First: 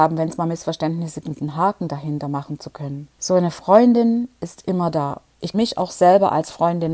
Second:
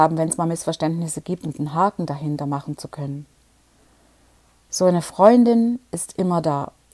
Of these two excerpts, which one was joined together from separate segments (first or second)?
first